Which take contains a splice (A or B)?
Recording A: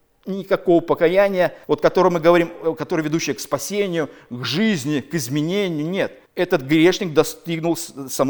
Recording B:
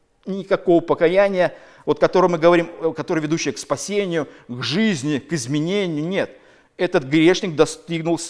A